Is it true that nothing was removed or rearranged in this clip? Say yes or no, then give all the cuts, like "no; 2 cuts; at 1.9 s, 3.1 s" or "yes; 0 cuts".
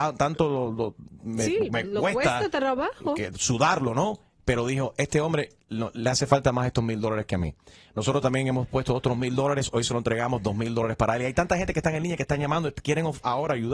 yes; 0 cuts